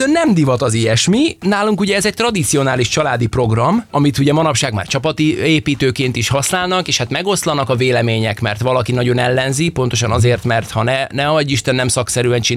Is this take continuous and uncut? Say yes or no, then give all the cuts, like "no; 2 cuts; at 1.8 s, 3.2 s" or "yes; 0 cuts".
yes; 0 cuts